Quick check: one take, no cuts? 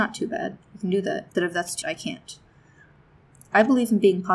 no; 2 cuts; at 1.3 s, 1.8 s

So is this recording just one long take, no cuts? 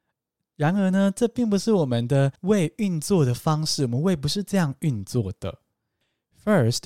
no; 1 cut; at 2.4 s

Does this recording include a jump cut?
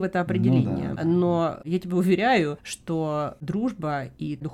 yes; 1 cut; at 1.0 s

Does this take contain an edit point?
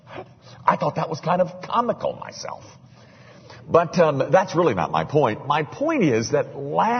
no; 0 cuts

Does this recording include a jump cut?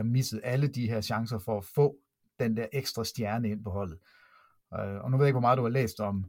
no; 0 cuts

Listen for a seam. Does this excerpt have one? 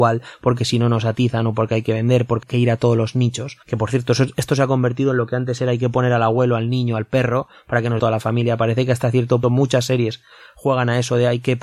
yes; 4 cuts; at 2.4 s, 3.6 s, 8.0 s, 9.4 s

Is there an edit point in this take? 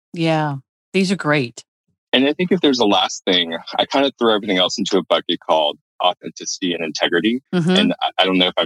yes; 1 cut; at 7.5 s

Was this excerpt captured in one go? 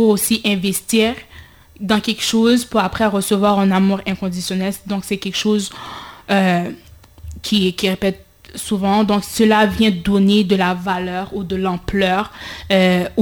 yes; 0 cuts

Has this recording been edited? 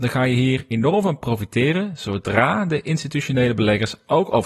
no; 0 cuts

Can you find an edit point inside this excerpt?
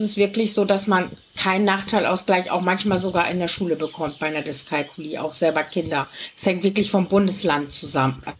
no; 0 cuts

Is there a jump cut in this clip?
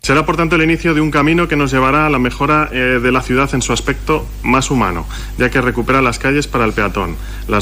no; 0 cuts

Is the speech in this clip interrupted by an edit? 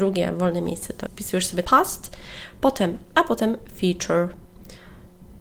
yes; 3 cuts; at 1.1 s, 1.6 s, 3.1 s

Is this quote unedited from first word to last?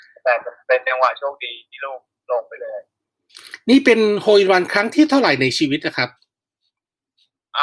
yes; 0 cuts

